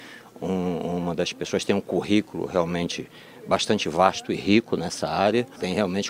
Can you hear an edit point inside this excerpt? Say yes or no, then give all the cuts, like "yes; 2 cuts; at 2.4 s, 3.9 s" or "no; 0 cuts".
no; 0 cuts